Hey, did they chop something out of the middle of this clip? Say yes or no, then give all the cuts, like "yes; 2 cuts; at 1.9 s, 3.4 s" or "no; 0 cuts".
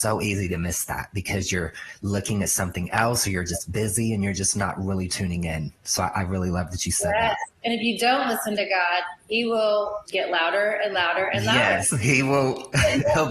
yes; 2 cuts; at 7.6 s, 10.1 s